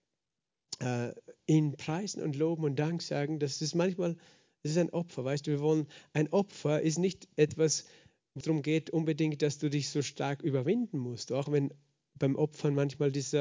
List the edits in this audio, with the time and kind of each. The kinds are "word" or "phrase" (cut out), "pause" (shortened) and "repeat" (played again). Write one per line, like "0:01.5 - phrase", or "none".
0:08.4 - word